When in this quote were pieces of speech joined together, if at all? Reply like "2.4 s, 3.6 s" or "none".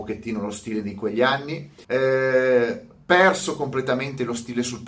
1.8 s